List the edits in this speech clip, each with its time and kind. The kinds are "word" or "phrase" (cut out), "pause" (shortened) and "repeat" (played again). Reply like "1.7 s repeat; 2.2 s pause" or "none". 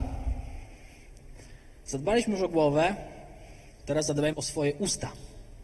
4.3 s word